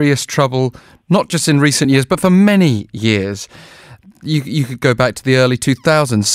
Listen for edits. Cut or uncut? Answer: uncut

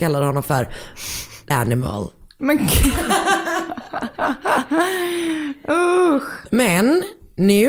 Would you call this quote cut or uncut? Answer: cut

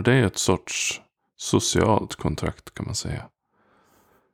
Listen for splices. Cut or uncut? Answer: uncut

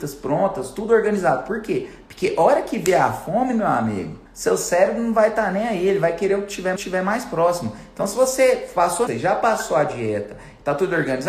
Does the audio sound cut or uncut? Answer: cut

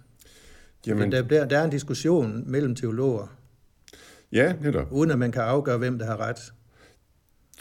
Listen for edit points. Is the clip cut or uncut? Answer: uncut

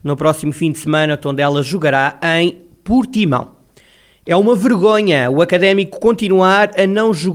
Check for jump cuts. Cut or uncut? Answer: uncut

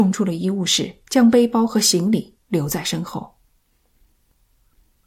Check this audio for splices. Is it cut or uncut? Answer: cut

